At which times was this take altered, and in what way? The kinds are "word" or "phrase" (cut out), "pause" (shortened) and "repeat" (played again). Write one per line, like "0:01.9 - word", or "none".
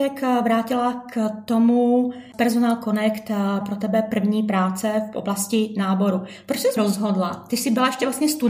0:03.6 - word
0:06.8 - word